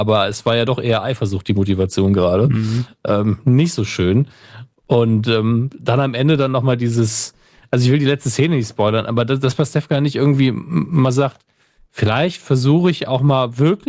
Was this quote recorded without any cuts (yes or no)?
yes